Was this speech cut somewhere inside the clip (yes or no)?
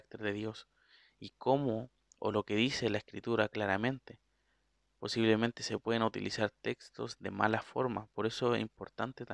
no